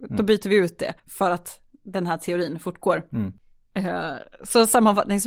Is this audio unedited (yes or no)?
no